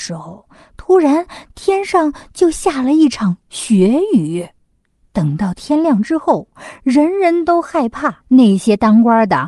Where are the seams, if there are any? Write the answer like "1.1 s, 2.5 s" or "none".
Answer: 8.2 s

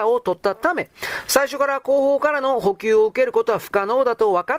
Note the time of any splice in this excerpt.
none

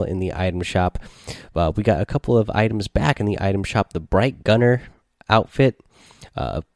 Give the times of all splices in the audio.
none

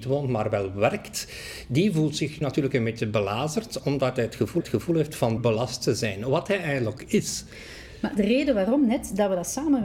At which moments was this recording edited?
2.4 s, 4.6 s, 5.4 s, 7.0 s

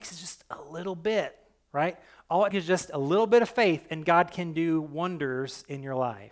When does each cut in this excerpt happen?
2.5 s

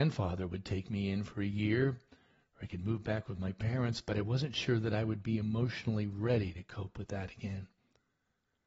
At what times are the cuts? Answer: none

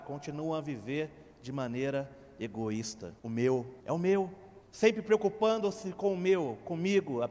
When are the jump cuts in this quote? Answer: 1.3 s, 3.2 s, 3.8 s, 4.6 s

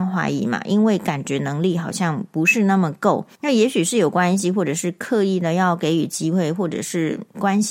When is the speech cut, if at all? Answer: 3.3 s

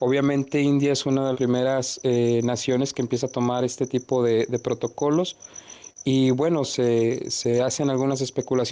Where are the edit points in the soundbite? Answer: 1.3 s

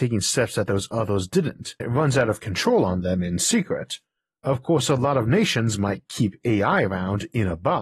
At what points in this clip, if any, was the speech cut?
1.8 s

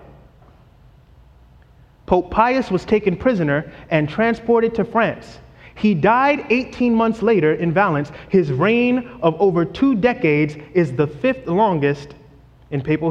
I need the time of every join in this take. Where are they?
none

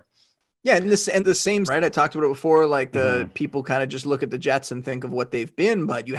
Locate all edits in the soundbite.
1.2 s, 1.7 s

